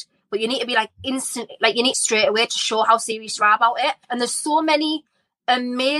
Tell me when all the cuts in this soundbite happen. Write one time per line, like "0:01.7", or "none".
0:01.9
0:04.0

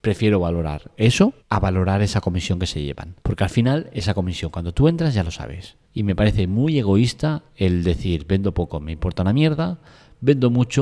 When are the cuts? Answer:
0:01.4
0:03.2
0:05.8
0:07.5

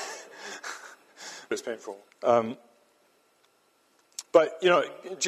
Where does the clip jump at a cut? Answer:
0:01.5
0:02.1

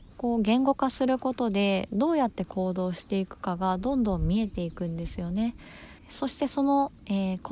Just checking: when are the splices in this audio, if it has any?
0:06.0

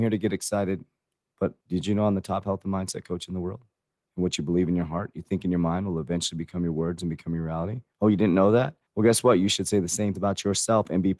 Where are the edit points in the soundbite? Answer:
0:01.6
0:07.9
0:08.9
0:10.2

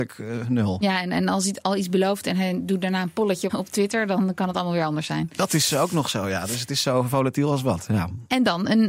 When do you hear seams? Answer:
0:03.5

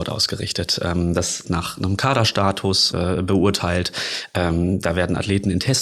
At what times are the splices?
0:01.4
0:02.9

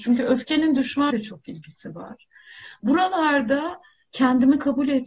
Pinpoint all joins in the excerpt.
0:01.1

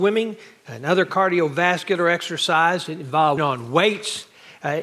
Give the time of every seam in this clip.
0:03.4

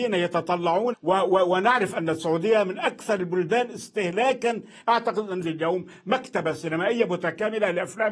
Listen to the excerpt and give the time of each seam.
0:00.9
0:04.8
0:05.4

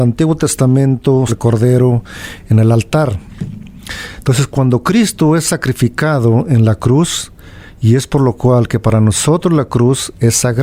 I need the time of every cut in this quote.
0:01.3

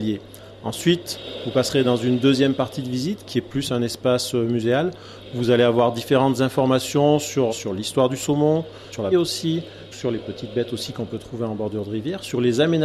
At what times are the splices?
0:07.5
0:09.1

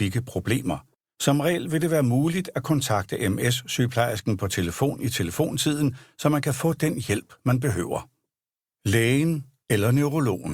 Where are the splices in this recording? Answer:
none

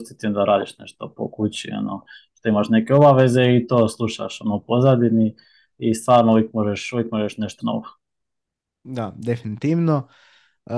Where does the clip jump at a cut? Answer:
0:07.6

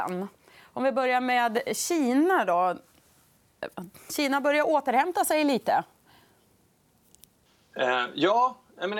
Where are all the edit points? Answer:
none

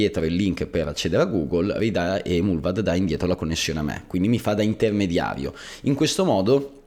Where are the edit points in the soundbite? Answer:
none

